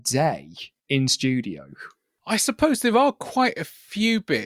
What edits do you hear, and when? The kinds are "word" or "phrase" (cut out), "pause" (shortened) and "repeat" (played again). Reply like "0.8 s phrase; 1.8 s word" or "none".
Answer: none